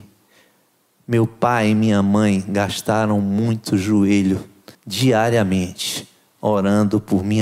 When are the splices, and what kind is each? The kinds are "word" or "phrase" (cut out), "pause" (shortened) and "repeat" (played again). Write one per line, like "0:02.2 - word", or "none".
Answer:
0:04.7 - pause